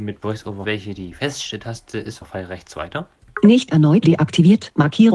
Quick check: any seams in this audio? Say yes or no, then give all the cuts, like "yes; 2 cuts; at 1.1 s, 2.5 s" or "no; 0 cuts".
yes; 1 cut; at 4.0 s